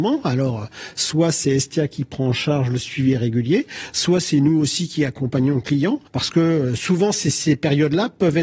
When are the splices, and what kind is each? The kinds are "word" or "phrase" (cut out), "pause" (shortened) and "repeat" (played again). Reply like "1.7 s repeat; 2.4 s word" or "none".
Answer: 6.1 s pause